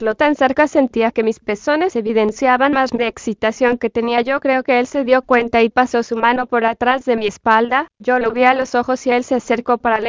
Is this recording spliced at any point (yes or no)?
yes